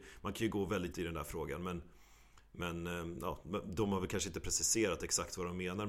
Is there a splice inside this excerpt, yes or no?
yes